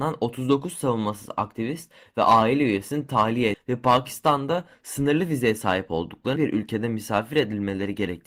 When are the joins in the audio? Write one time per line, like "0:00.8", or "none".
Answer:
0:03.5
0:06.4